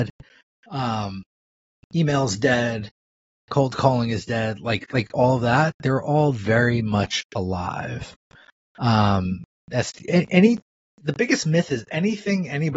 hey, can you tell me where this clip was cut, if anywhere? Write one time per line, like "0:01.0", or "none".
none